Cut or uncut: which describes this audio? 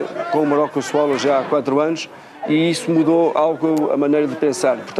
uncut